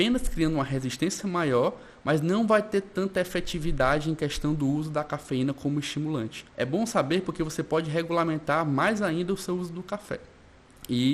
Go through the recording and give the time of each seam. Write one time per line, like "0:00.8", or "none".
0:06.5